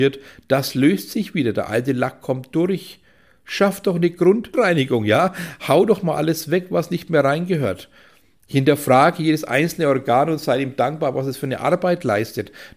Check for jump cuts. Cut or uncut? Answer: uncut